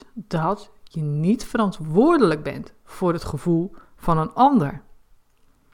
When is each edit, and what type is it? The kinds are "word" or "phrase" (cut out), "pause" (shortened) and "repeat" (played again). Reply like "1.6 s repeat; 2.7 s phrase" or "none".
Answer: none